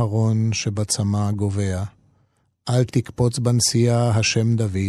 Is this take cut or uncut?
uncut